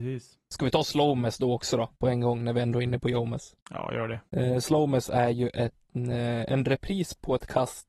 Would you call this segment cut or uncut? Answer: cut